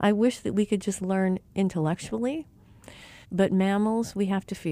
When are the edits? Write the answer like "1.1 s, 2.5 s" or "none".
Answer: 3.2 s